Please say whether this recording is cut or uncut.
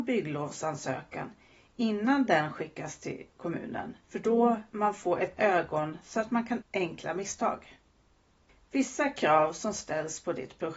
cut